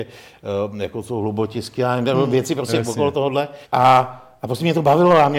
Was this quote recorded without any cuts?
no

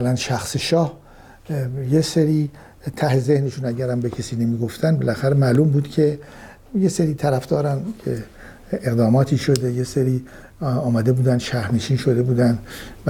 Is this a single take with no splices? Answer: yes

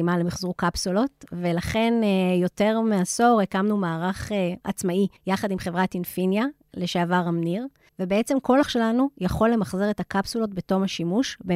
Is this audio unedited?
no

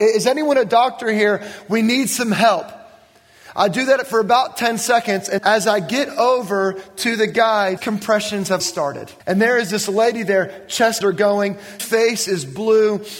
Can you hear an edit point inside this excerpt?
yes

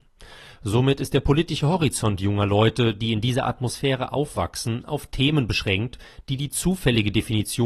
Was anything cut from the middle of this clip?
no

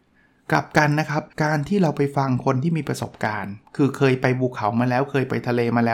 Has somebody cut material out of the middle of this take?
yes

